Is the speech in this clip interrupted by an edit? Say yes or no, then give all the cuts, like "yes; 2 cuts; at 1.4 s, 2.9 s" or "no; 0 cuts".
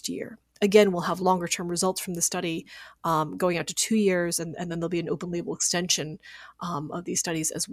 no; 0 cuts